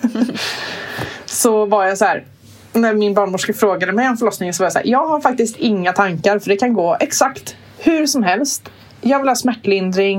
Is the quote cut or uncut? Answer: uncut